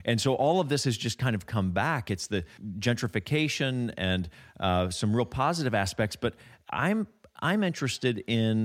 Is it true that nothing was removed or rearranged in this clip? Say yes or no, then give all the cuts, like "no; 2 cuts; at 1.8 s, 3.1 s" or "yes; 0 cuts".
yes; 0 cuts